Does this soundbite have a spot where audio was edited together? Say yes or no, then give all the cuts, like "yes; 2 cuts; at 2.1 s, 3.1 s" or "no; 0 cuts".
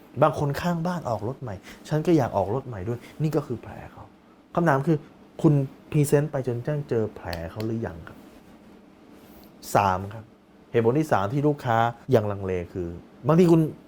yes; 1 cut; at 12.0 s